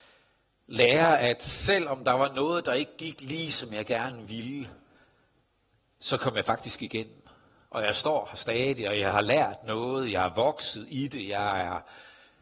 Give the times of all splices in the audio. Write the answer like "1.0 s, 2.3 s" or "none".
none